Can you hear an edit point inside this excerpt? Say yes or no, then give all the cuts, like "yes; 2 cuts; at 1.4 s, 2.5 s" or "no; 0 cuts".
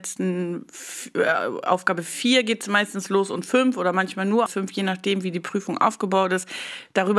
yes; 1 cut; at 4.5 s